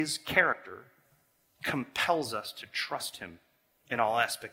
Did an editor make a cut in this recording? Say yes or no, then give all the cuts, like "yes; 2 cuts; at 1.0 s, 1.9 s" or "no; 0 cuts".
no; 0 cuts